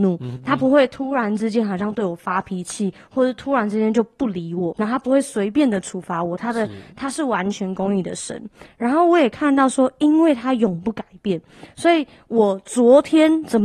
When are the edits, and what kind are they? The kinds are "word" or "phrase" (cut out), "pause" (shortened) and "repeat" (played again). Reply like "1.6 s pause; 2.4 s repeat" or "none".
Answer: 4.7 s word